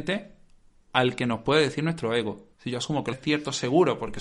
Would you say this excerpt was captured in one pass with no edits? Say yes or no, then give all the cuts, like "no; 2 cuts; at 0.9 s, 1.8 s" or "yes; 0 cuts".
no; 2 cuts; at 2.5 s, 3.1 s